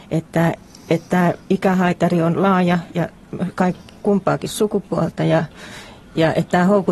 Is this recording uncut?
yes; 0 cuts

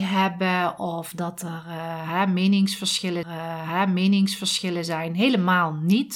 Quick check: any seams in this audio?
yes; 1 cut; at 3.2 s

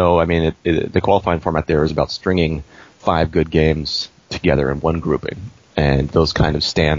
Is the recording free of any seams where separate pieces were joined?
yes; 0 cuts

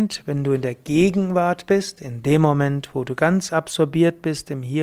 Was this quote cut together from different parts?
no; 0 cuts

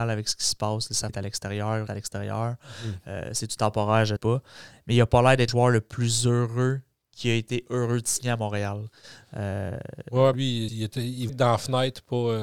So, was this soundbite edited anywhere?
yes; 7 cuts; at 1.1 s, 1.9 s, 4.2 s, 5.5 s, 10.3 s, 10.7 s, 11.3 s

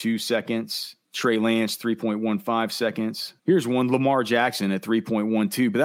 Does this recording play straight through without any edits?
no; 2 cuts; at 1.0 s, 3.4 s

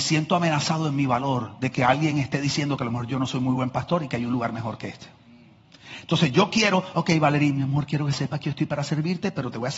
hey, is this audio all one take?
yes; 0 cuts

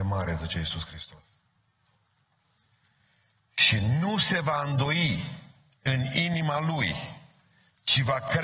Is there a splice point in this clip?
no; 0 cuts

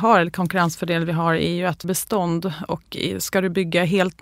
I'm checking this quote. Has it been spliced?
yes; 1 cut; at 1.8 s

